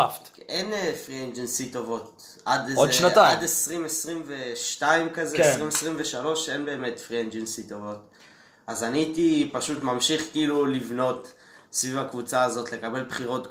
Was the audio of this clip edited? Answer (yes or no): no